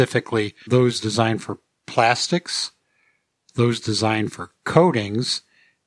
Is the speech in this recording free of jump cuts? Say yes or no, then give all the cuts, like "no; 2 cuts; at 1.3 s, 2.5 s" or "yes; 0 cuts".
yes; 0 cuts